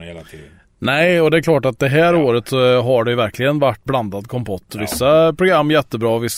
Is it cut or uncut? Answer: cut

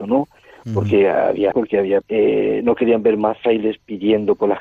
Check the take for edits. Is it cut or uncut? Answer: cut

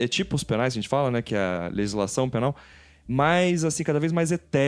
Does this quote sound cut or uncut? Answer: uncut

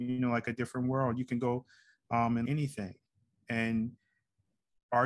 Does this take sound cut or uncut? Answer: cut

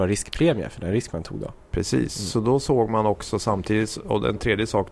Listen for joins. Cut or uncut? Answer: uncut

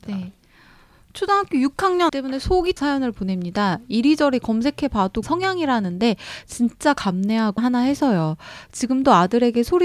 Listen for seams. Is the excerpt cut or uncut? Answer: cut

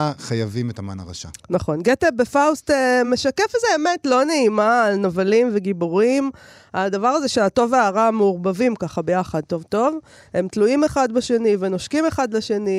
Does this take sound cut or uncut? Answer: uncut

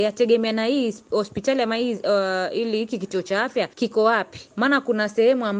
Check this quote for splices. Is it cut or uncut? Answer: cut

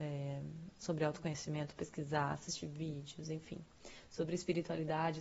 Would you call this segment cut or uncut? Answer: uncut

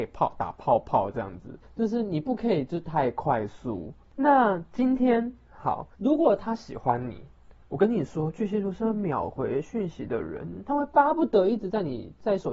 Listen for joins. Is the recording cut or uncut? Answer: cut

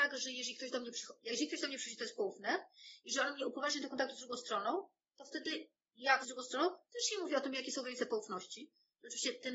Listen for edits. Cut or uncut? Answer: cut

